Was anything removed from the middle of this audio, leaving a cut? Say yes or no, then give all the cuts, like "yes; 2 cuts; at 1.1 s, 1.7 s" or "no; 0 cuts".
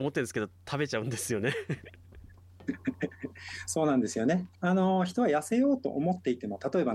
yes; 1 cut; at 4.6 s